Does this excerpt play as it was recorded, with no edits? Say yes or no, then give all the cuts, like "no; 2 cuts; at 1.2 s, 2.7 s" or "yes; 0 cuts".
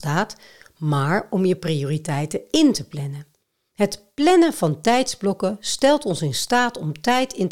yes; 0 cuts